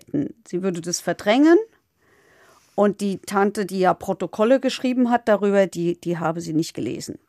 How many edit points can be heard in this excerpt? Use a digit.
0